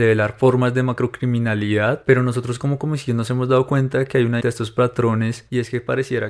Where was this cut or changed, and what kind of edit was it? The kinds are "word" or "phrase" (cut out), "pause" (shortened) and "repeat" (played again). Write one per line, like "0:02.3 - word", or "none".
0:04.4 - phrase